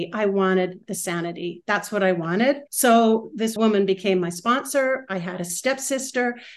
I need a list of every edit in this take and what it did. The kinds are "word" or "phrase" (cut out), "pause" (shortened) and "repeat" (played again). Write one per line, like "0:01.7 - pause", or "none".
0:02.7 - pause
0:03.6 - word